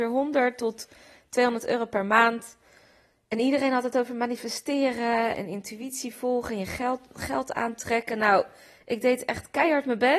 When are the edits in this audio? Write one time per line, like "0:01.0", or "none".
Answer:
0:05.3